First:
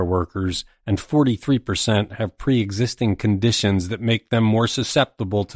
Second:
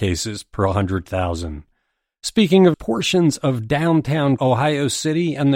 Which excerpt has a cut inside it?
second; 2 cuts; at 2.7 s, 4.4 s

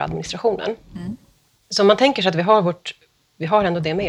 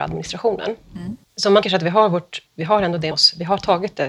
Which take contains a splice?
second; 4 cuts; at 1.2 s, 1.6 s, 2.5 s, 3.1 s

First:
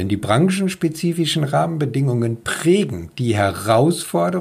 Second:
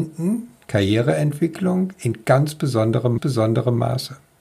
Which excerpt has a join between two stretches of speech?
second; 1 cut; at 3.2 s

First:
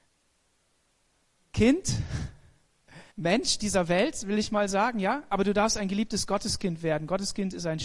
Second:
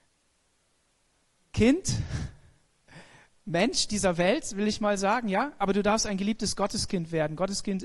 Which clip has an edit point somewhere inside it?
first; 1 cut; at 3.1 s

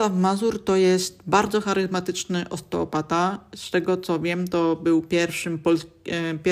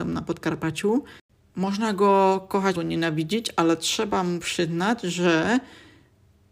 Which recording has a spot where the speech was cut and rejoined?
second; 1 cut; at 2.7 s

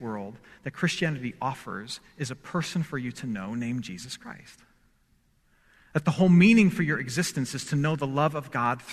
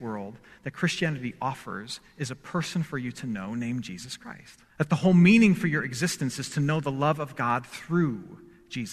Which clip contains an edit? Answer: second; 1 cut; at 4.7 s

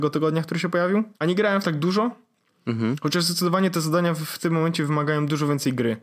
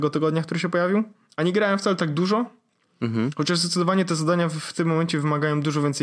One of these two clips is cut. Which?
first; 2 cuts; at 1.1 s, 1.6 s

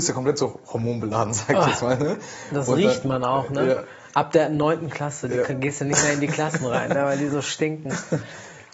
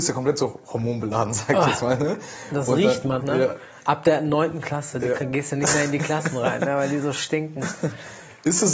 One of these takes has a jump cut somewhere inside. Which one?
second; 1 cut; at 3.2 s

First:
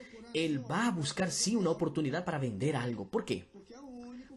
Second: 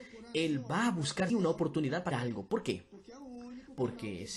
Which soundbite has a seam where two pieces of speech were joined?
second; 2 cuts; at 1.3 s, 2.1 s

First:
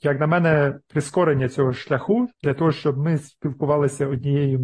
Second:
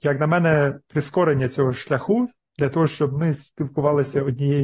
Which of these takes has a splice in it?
first; 1 cut; at 2.3 s

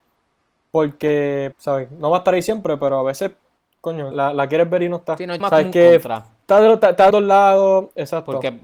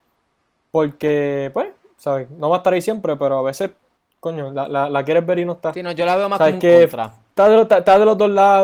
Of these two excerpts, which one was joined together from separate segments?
first; 4 cuts; at 1.5 s, 4.1 s, 5.4 s, 7.1 s

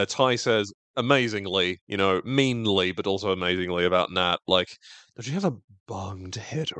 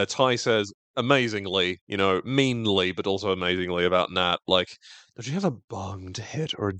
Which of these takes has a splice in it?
second; 1 cut; at 5.6 s

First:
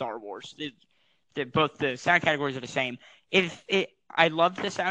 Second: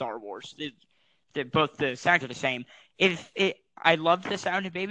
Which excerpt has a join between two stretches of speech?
second; 1 cut; at 2.2 s

